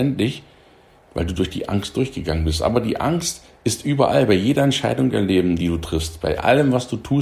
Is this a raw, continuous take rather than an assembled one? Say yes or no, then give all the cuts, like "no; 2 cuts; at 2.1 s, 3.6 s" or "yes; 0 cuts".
yes; 0 cuts